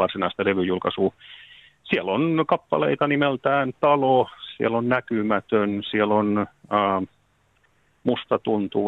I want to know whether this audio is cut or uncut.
uncut